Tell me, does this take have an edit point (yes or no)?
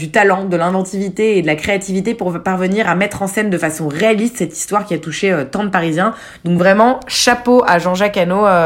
no